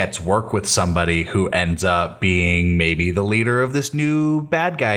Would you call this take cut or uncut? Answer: uncut